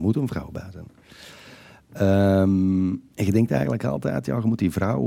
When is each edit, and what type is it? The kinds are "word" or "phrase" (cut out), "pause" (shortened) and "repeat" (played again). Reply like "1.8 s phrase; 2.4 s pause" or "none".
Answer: none